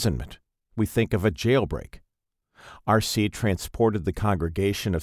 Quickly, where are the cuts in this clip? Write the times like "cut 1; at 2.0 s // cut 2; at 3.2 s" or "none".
none